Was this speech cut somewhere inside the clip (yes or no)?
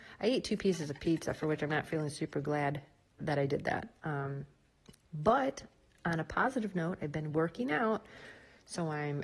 no